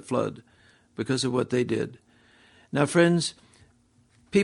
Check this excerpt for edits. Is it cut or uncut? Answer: uncut